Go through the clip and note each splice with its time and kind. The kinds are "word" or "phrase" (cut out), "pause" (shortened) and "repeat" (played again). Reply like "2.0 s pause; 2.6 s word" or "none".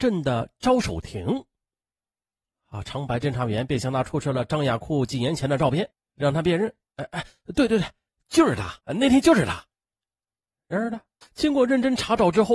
8.8 s pause; 11.2 s pause